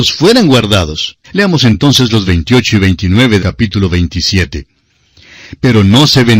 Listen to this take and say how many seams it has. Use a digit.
3